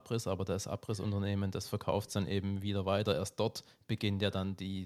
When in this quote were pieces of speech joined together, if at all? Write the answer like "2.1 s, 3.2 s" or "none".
none